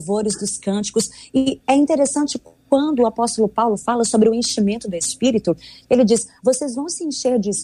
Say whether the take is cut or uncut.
uncut